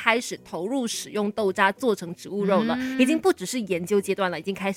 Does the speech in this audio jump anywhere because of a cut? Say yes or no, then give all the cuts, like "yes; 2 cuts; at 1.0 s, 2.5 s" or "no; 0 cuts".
no; 0 cuts